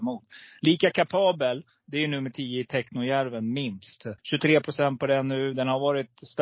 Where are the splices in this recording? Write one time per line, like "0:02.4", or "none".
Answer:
0:04.2